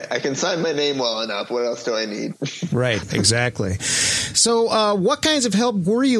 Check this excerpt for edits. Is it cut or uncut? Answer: uncut